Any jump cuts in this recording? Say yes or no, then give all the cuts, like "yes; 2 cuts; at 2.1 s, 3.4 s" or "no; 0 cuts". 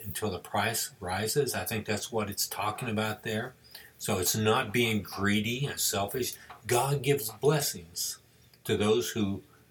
no; 0 cuts